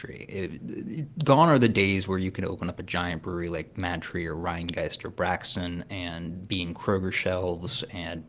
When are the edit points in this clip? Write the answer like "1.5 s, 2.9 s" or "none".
none